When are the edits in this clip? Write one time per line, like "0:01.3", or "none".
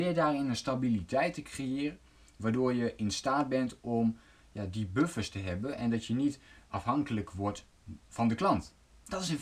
none